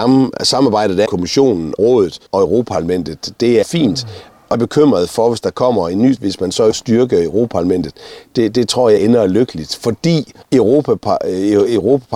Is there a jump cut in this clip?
yes; 9 cuts; at 1.1 s, 1.8 s, 2.3 s, 3.6 s, 4.5 s, 6.2 s, 6.7 s, 9.0 s, 10.4 s

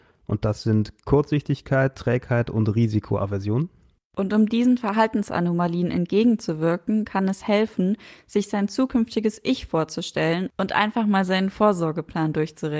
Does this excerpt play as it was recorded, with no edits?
no; 1 cut; at 4.0 s

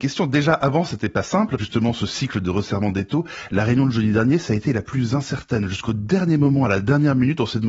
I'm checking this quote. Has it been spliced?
yes; 1 cut; at 1.6 s

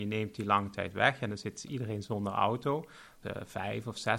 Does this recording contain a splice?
yes; 1 cut; at 3.2 s

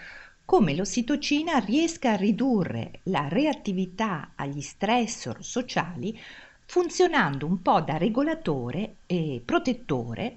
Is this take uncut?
yes; 0 cuts

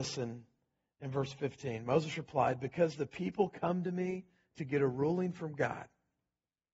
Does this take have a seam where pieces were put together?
no; 0 cuts

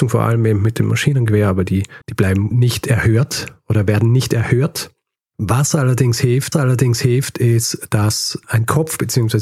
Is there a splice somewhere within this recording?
yes; 4 cuts; at 2.0 s, 2.5 s, 6.5 s, 8.4 s

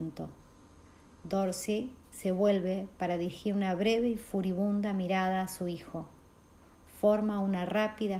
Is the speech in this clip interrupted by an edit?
no; 0 cuts

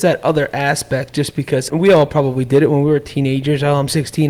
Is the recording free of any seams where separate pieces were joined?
no; 1 cut; at 1.7 s

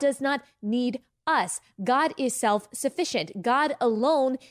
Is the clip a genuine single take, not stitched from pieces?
yes; 0 cuts

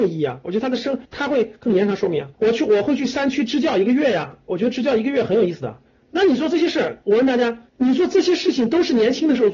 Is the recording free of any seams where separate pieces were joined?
no; 4 cuts; at 1.0 s, 2.3 s, 5.9 s, 7.7 s

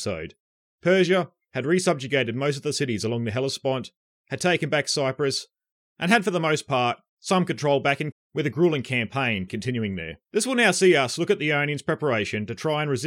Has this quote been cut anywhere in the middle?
yes; 3 cuts; at 8.1 s, 9.5 s, 10.2 s

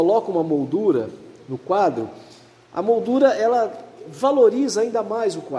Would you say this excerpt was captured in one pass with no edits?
yes; 0 cuts

